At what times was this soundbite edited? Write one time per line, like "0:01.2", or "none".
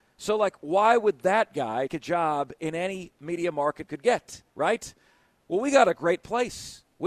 0:01.9
0:03.8
0:04.5